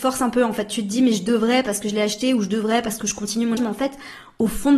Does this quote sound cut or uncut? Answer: cut